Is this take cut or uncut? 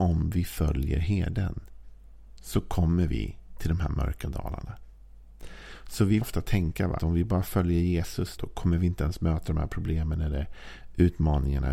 cut